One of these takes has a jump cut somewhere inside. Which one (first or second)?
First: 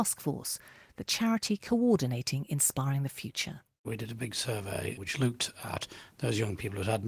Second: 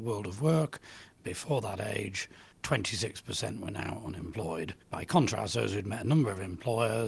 second